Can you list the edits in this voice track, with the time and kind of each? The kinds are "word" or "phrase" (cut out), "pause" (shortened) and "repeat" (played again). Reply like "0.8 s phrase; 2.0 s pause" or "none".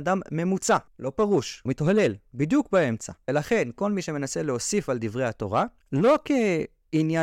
1.7 s word